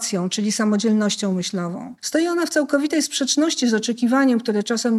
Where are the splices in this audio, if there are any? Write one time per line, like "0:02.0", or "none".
0:02.0